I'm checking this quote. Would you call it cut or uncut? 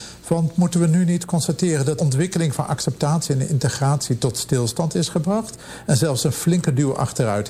cut